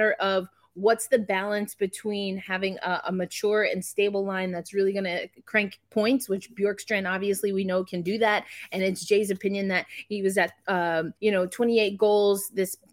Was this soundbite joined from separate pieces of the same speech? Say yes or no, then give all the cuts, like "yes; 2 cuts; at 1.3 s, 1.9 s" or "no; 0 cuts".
yes; 1 cut; at 11.2 s